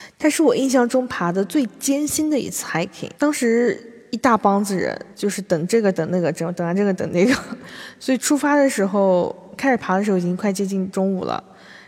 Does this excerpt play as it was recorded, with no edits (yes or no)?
no